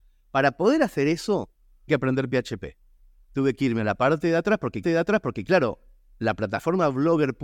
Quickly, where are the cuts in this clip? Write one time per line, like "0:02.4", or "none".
0:01.9
0:04.8